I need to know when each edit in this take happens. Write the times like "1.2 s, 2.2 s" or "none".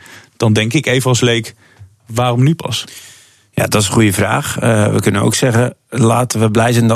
none